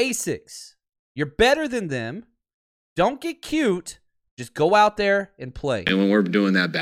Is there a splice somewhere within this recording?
no; 0 cuts

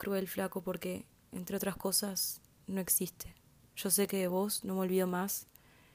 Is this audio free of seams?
yes; 0 cuts

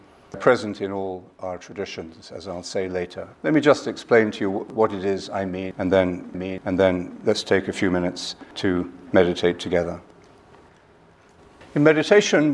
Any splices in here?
yes; 2 cuts; at 3.3 s, 6.3 s

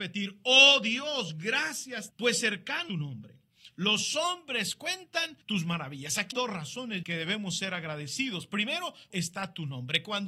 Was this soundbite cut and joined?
yes; 6 cuts; at 2.1 s, 2.9 s, 5.4 s, 6.3 s, 7.0 s, 9.1 s

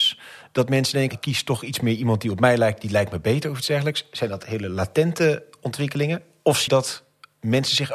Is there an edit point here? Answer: yes; 2 cuts; at 1.1 s, 6.7 s

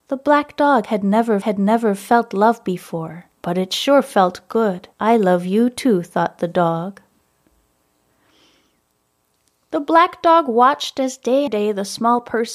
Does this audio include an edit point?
yes; 4 cuts; at 1.4 s, 3.3 s, 4.9 s, 11.5 s

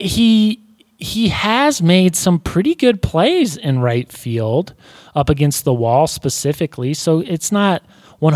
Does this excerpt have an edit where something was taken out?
no; 0 cuts

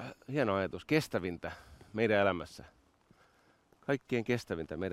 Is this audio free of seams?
yes; 0 cuts

